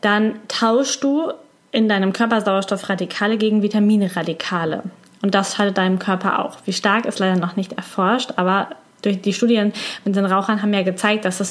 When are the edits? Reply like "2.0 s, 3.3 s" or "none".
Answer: none